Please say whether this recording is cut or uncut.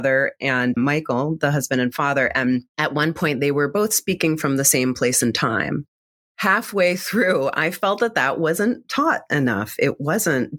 uncut